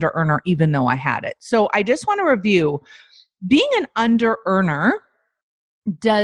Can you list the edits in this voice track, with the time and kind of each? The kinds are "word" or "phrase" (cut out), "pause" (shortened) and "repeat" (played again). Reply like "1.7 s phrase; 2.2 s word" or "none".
none

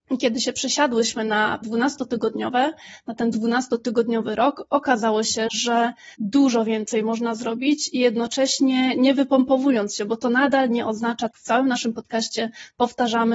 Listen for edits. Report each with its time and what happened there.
1.6 s word; 6.1 s pause; 11.3 s phrase

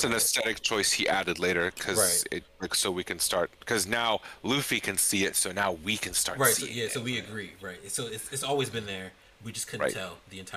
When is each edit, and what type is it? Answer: none

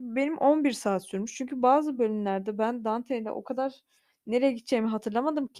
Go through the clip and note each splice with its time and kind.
none

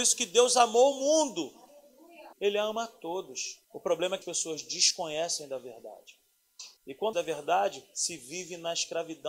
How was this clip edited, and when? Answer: 2.3 s pause; 3.6 s pause; 4.2 s word; 6.8 s pause; 7.1 s phrase

